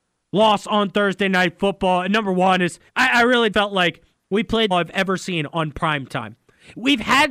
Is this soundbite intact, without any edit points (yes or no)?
no